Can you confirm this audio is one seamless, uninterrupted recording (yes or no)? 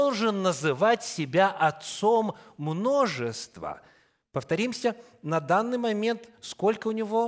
yes